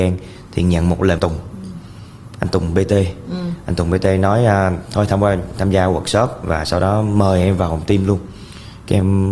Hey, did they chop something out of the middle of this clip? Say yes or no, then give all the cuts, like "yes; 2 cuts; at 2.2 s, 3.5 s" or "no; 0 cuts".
yes; 1 cut; at 1.2 s